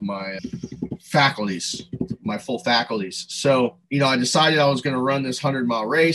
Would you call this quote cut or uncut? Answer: cut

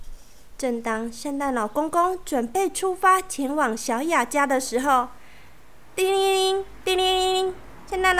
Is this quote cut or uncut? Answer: cut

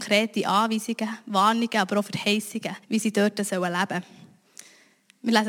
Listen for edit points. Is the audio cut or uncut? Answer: cut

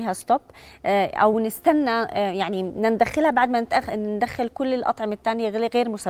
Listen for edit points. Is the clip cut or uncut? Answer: uncut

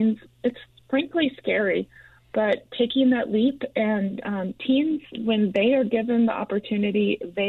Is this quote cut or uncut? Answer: uncut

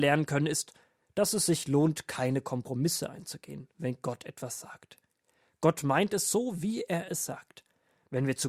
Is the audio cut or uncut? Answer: uncut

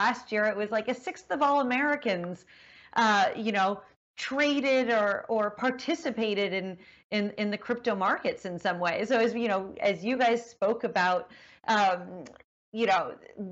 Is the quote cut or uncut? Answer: uncut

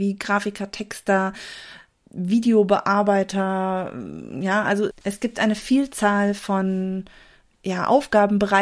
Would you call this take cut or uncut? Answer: uncut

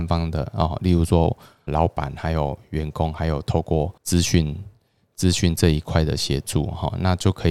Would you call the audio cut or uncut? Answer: cut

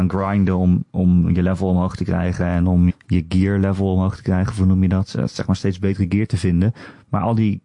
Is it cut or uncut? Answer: cut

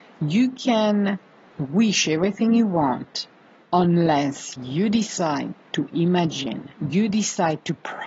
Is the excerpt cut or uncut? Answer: uncut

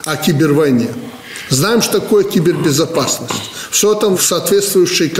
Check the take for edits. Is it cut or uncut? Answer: uncut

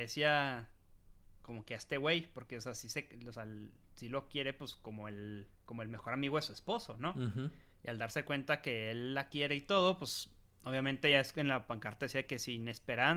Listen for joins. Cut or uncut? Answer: uncut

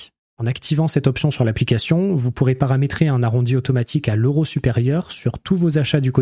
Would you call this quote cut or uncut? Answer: uncut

